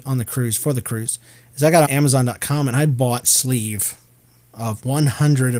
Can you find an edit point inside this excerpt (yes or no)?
yes